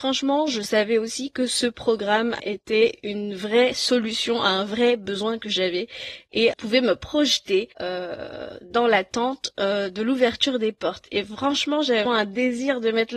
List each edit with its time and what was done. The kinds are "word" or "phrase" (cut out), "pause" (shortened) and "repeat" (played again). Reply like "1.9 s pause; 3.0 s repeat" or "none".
6.5 s phrase; 7.7 s pause; 12.1 s word

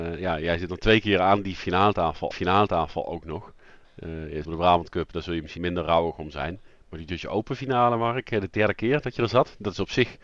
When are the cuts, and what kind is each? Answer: 2.3 s repeat; 4.4 s word; 5.6 s word

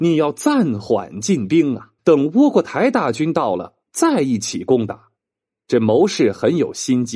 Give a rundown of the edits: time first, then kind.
2.0 s pause; 3.8 s pause; 5.1 s pause

